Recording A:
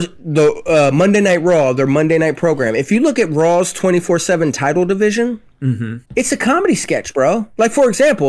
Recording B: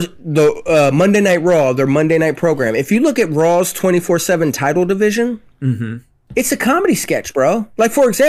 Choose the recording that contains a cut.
A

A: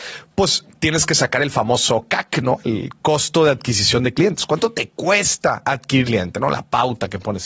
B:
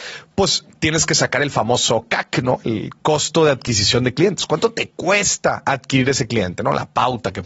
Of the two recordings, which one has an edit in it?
A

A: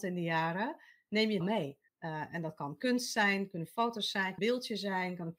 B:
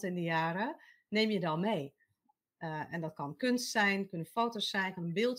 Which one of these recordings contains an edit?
A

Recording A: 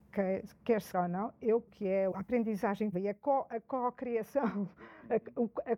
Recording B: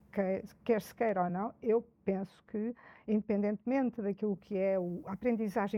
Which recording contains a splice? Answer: A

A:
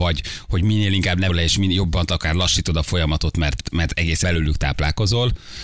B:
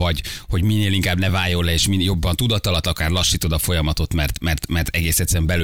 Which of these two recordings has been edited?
A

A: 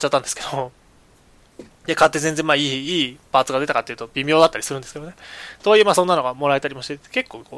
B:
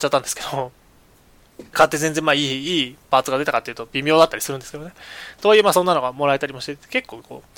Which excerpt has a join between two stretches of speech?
B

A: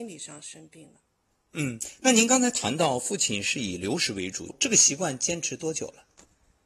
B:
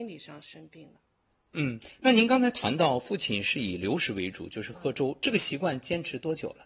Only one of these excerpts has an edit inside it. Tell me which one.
A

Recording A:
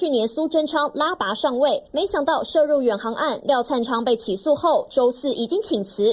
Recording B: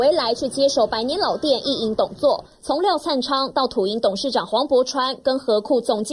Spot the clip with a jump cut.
A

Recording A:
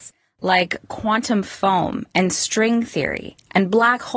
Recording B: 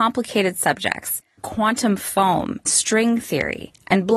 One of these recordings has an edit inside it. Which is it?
B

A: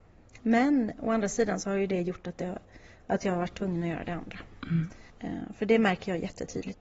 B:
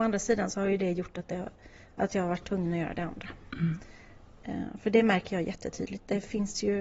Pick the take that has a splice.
A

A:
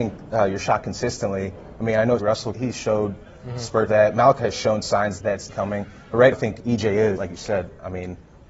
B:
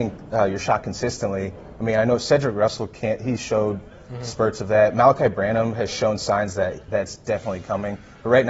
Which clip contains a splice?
A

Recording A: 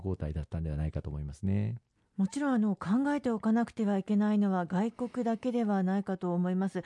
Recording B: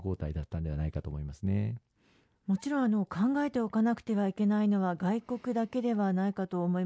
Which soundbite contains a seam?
A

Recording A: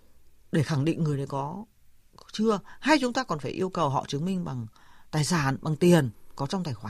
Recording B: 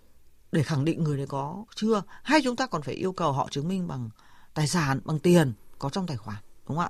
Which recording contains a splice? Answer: B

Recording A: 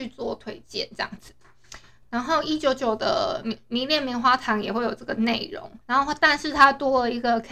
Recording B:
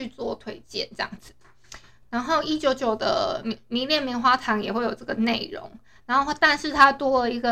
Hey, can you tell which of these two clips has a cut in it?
A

